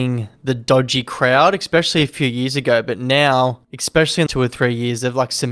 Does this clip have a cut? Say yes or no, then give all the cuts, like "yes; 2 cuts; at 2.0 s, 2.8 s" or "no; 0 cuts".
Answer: yes; 2 cuts; at 3.6 s, 4.3 s